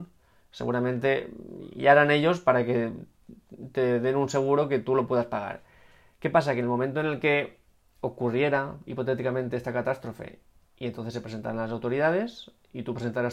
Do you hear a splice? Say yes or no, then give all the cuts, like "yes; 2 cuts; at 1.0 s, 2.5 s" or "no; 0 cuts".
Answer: no; 0 cuts